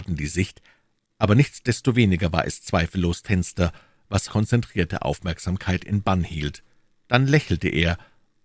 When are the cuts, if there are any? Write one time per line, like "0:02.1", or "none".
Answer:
0:03.2
0:04.3
0:06.9